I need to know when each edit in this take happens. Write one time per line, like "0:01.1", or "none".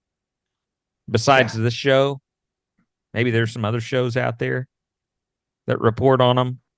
none